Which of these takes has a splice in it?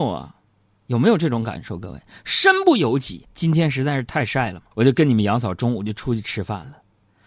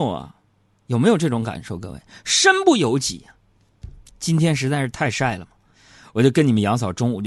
first; 2 cuts; at 3.2 s, 4.7 s

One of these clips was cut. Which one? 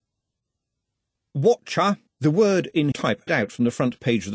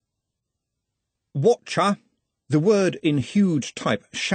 first; 3 cuts; at 2.1 s, 2.9 s, 3.3 s

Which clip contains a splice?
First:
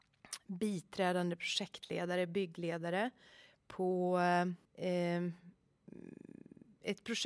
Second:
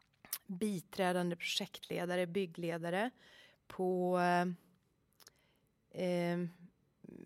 first; 1 cut; at 4.6 s

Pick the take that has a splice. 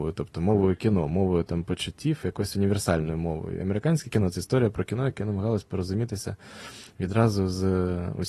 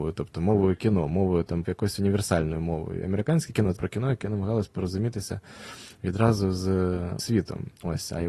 second; 3 cuts; at 1.6 s, 3.7 s, 7.2 s

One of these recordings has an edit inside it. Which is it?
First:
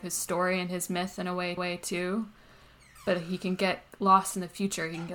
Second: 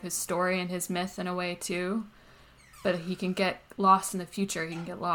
first; 1 cut; at 1.6 s

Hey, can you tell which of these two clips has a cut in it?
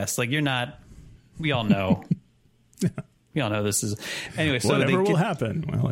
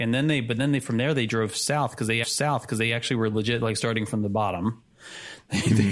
second; 1 cut; at 2.2 s

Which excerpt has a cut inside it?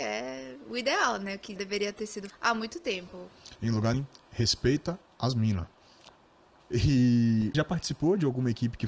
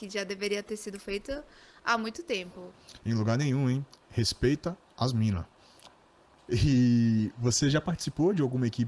first; 4 cuts; at 1.6 s, 2.3 s, 3.9 s, 7.5 s

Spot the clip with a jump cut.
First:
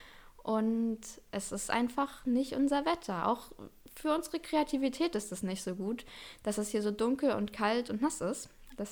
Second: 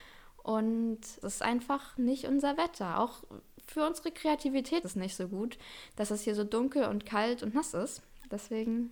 second; 2 cuts; at 1.2 s, 4.8 s

